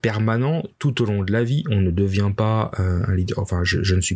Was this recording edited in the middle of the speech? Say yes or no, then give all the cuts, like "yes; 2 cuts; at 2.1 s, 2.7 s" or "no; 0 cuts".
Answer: no; 0 cuts